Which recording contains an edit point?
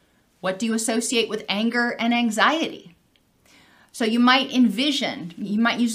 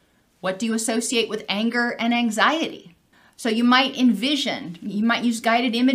second; 1 cut; at 3.1 s

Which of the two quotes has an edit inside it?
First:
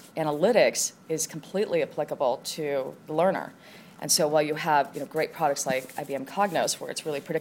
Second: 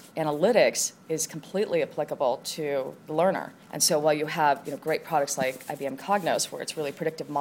second; 1 cut; at 3.6 s

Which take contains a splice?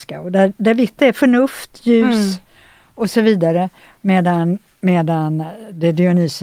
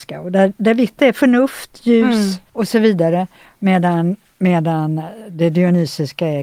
second; 1 cut; at 2.5 s

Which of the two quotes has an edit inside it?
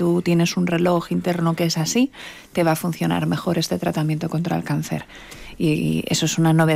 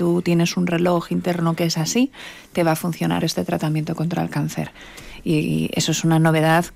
second; 1 cut; at 3.2 s

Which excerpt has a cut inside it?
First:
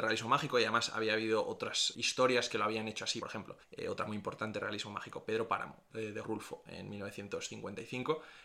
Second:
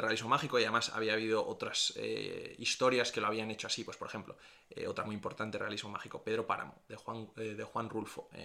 first; 5 cuts; at 1.9 s, 3.2 s, 3.6 s, 5.9 s, 6.2 s

